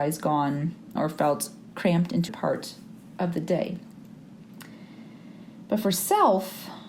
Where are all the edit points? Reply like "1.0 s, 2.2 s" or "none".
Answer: 1.0 s, 2.3 s